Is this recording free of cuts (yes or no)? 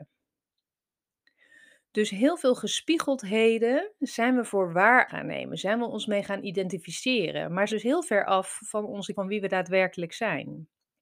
no